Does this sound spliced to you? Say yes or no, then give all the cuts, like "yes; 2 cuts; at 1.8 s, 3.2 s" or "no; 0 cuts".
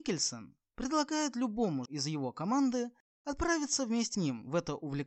yes; 2 cuts; at 1.9 s, 4.1 s